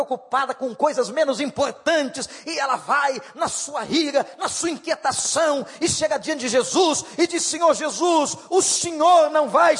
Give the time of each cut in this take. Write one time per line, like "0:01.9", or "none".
none